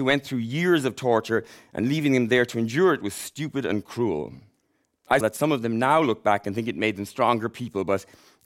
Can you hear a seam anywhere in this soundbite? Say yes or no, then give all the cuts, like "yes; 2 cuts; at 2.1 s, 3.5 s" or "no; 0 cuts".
yes; 1 cut; at 5.2 s